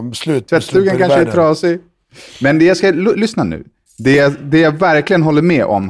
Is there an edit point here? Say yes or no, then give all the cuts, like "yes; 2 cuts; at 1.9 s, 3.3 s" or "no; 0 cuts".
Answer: no; 0 cuts